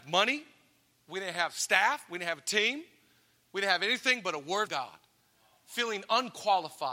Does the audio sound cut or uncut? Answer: cut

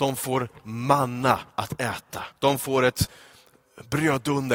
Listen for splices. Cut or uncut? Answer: cut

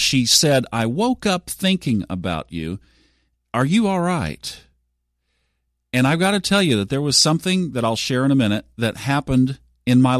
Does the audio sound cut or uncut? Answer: uncut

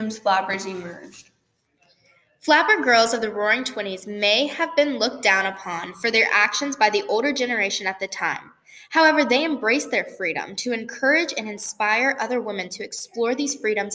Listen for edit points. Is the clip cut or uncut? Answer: uncut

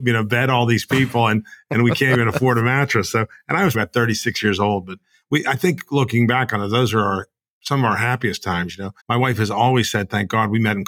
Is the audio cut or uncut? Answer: cut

